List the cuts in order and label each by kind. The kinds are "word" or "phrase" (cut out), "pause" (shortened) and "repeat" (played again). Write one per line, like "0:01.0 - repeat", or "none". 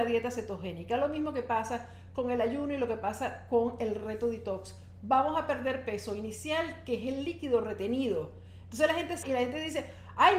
0:09.2 - word